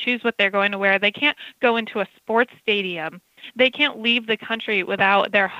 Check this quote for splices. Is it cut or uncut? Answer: uncut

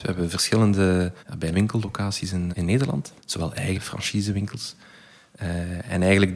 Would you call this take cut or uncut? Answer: cut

